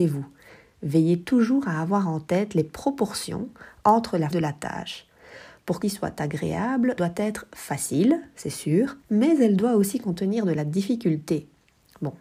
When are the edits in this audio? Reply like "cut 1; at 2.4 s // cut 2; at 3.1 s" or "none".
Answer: cut 1; at 4.3 s // cut 2; at 5.8 s // cut 3; at 7.0 s // cut 4; at 9.0 s